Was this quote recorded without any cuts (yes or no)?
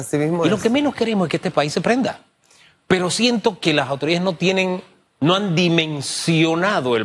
yes